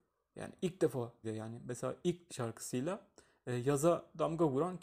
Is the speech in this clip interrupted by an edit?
yes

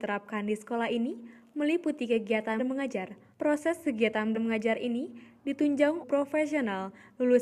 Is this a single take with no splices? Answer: no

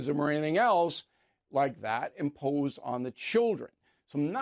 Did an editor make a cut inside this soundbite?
no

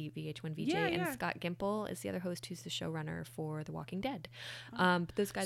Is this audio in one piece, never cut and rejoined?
yes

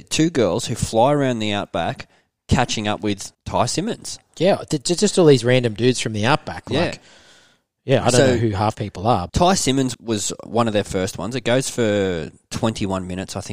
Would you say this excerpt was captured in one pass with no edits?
no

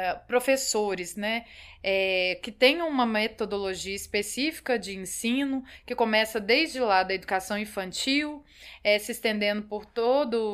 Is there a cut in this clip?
no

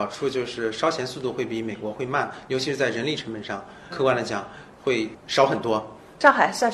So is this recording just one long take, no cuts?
no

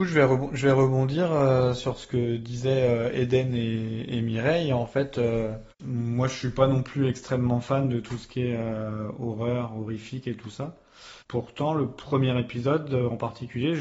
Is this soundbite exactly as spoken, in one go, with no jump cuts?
no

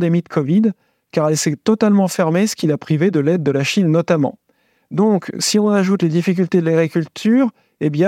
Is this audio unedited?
yes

